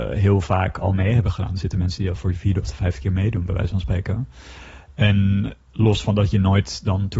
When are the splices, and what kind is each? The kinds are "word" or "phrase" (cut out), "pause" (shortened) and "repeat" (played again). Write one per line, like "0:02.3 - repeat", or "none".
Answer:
none